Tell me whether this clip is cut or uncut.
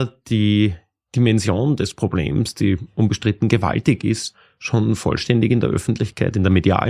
uncut